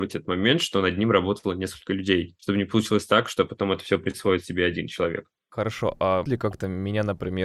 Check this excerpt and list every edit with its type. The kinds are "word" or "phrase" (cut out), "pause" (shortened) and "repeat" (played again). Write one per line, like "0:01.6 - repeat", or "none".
0:02.4 - pause
0:06.2 - word